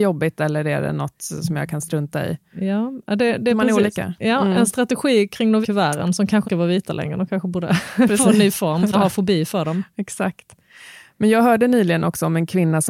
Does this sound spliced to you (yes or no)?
yes